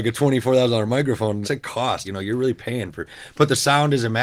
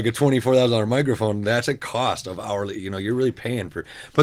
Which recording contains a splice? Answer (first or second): first